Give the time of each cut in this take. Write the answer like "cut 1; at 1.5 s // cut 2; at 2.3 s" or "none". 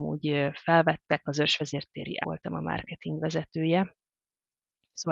cut 1; at 1.2 s // cut 2; at 2.2 s